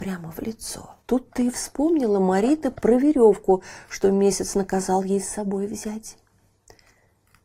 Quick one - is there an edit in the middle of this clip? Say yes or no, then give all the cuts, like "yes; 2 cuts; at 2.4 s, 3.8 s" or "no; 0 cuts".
yes; 1 cut; at 1.0 s